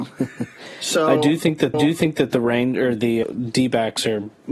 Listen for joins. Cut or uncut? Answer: cut